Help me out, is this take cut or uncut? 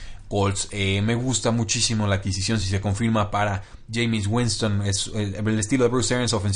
uncut